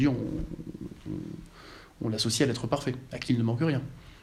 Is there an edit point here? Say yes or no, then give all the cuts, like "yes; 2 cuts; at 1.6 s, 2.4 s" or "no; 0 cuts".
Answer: no; 0 cuts